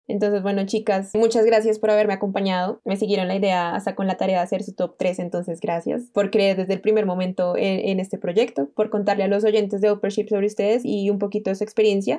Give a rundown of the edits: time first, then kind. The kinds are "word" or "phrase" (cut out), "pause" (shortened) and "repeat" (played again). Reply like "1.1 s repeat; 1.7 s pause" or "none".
none